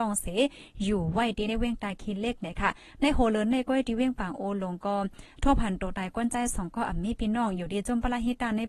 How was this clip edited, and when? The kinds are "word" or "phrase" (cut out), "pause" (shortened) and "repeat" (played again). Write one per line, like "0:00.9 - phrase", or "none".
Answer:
none

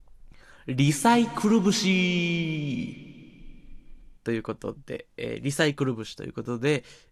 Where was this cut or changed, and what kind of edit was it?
0:04.2 - pause

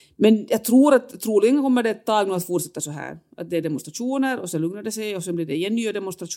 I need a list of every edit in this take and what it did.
none

